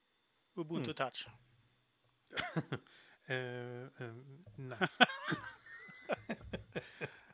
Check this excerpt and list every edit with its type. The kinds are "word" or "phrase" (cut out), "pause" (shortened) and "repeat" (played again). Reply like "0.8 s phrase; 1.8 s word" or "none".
none